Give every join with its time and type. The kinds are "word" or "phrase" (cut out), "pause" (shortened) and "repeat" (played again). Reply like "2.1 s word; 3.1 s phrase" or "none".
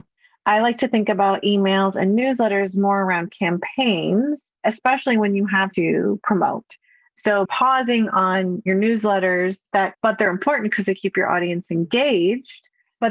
5.7 s phrase; 7.4 s word; 9.9 s phrase